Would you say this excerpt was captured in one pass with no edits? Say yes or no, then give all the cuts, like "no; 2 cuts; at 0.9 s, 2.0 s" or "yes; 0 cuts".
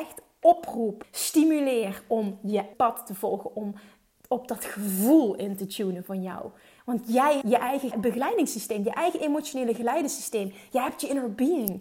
no; 4 cuts; at 1.0 s, 2.7 s, 7.4 s, 7.9 s